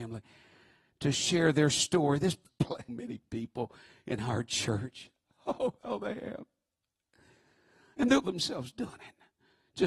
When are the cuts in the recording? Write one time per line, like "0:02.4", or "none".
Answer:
0:02.5
0:02.9
0:05.8
0:08.2